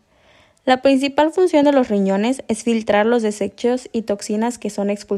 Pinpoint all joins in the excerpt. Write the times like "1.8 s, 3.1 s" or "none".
none